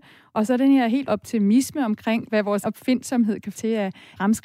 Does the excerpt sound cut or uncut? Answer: cut